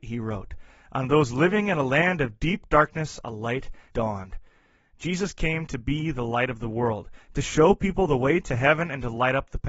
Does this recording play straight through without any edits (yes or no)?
no